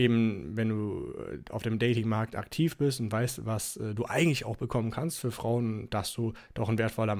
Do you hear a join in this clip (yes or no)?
no